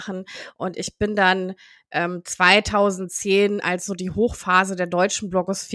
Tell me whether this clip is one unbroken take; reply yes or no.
yes